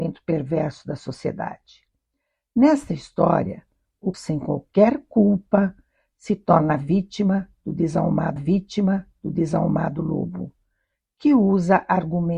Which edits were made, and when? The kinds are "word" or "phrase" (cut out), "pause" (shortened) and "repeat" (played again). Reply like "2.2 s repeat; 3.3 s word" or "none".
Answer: 4.1 s word; 8.4 s repeat